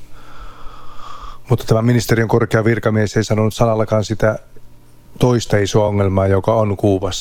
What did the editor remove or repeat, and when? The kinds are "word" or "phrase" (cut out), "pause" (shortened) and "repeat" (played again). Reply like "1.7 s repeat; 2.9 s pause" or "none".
none